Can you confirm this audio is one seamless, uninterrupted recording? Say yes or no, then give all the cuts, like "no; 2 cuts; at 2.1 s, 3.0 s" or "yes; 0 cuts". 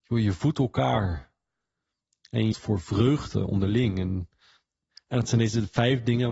no; 1 cut; at 2.5 s